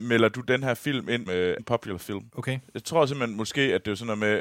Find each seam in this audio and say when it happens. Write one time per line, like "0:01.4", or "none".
0:01.3
0:01.6
0:02.3

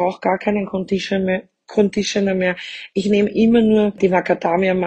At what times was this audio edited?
none

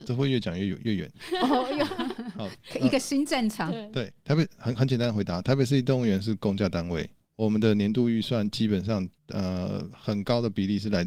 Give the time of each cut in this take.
0:09.2

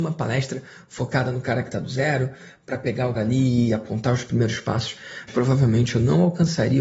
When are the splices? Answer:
0:03.1
0:05.3

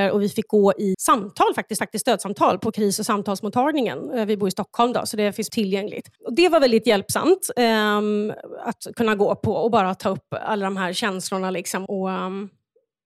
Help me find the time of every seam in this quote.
0:00.9
0:01.8
0:05.5
0:06.2
0:11.9

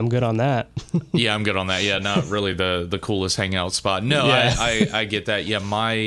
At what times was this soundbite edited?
none

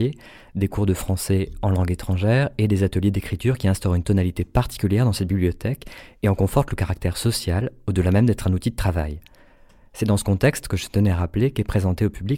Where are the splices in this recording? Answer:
none

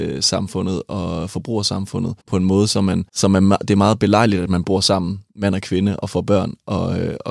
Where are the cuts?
0:02.2
0:03.1

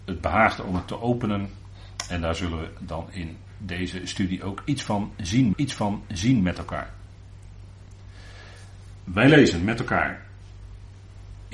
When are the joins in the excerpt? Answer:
0:05.5

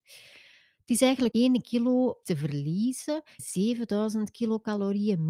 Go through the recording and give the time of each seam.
0:01.3
0:02.2
0:03.4

